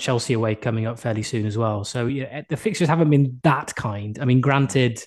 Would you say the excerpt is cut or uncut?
uncut